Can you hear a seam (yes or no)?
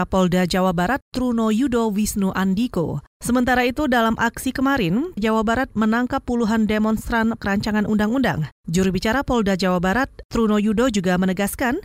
yes